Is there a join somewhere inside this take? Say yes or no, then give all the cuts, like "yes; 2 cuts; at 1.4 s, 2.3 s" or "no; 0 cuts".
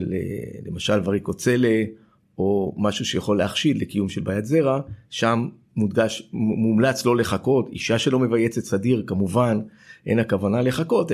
no; 0 cuts